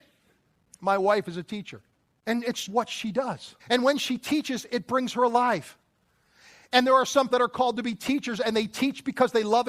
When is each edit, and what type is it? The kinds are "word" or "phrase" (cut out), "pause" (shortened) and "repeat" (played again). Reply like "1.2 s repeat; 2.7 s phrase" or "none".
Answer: 2.0 s pause; 2.7 s word; 3.6 s pause; 7.3 s word